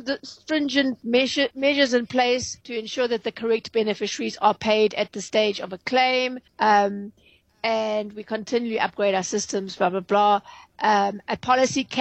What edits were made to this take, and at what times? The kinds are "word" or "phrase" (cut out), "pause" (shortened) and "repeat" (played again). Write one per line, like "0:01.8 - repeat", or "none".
0:02.6 - pause
0:06.5 - pause